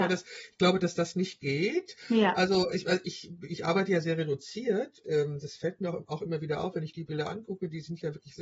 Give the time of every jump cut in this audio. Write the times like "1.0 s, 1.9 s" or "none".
5.0 s